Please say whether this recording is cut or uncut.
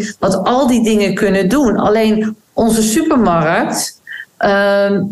uncut